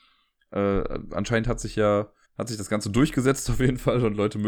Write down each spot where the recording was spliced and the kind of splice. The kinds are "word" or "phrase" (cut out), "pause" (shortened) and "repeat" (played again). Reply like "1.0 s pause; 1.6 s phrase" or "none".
2.3 s pause